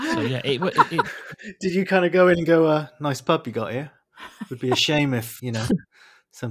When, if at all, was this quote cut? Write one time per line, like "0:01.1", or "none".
0:05.4